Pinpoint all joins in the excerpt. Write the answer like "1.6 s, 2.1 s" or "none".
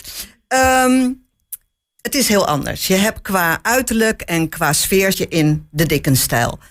5.1 s